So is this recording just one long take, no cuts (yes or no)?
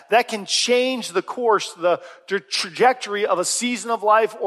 yes